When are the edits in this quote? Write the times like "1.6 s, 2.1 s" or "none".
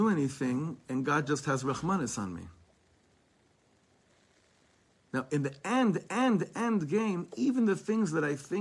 6.1 s